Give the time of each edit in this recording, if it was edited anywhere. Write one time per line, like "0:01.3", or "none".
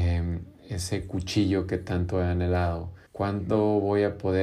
0:03.1